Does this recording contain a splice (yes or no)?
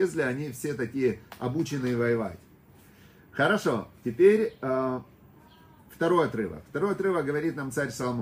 no